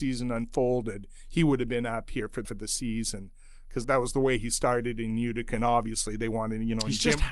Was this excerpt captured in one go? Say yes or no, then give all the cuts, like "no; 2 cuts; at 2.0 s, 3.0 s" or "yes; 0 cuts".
no; 2 cuts; at 2.4 s, 3.8 s